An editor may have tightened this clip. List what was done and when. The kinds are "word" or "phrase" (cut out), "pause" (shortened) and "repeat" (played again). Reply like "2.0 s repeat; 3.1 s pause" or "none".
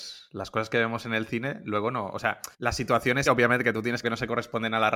2.5 s pause; 3.3 s word; 4.0 s word

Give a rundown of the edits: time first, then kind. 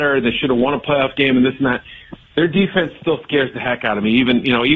none

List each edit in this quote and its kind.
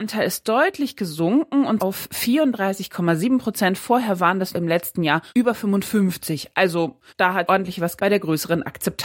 1.8 s word; 4.5 s word; 5.3 s pause; 7.1 s pause; 7.5 s word; 8.0 s word

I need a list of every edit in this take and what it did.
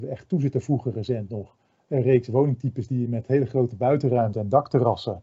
none

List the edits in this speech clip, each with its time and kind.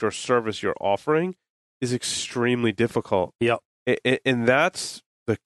none

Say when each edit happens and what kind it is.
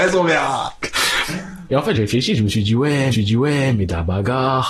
1.9 s word; 3.1 s repeat

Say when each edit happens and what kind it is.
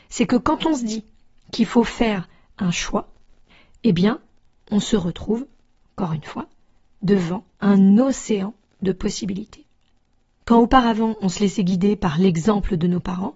none

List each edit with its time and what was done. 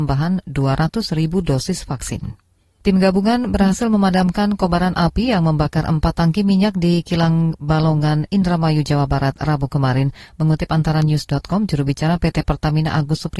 2.6 s pause

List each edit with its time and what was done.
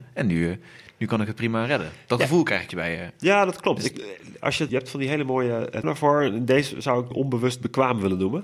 2.7 s word; 3.9 s word; 4.7 s word; 5.8 s word; 7.1 s word

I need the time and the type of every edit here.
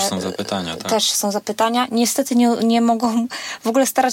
none

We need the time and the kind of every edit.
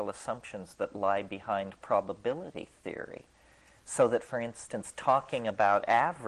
none

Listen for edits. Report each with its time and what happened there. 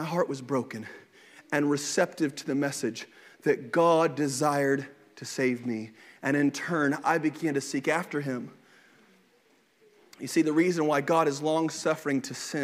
none

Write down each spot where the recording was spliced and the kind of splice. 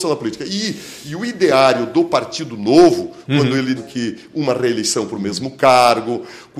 3.8 s phrase

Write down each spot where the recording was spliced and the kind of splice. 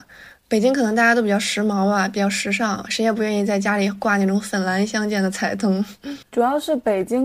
6.2 s pause

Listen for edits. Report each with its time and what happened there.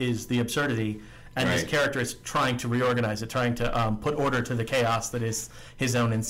none

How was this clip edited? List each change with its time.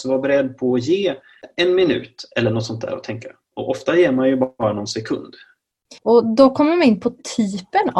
6.0 s pause

